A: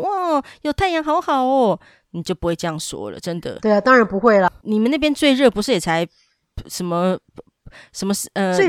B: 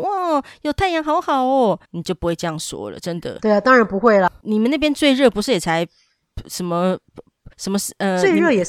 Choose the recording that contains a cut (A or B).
B